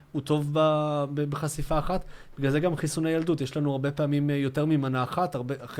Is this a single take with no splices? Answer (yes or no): yes